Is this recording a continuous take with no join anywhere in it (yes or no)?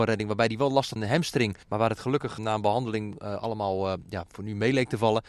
no